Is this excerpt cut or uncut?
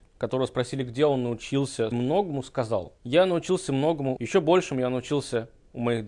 cut